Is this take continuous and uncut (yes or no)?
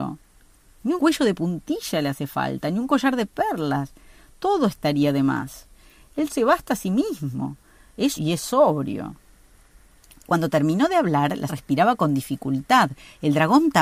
no